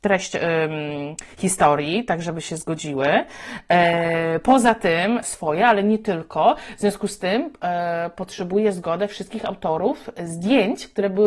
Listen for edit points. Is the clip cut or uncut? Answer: cut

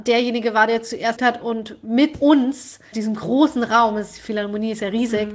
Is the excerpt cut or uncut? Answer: cut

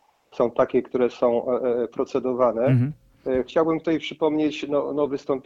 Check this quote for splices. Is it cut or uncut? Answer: uncut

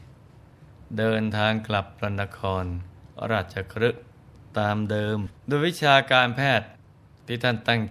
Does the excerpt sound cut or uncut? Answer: cut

